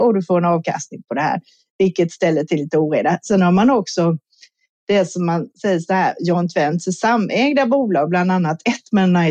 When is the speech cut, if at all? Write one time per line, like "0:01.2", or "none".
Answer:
none